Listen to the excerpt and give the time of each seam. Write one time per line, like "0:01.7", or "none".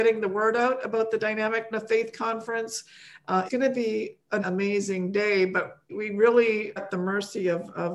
0:01.7
0:03.5
0:04.4
0:05.9
0:06.8